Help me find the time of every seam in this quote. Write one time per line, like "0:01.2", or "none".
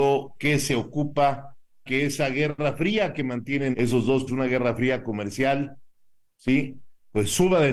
0:01.9
0:03.7
0:04.3